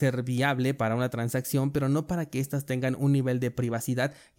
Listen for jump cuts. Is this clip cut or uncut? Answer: uncut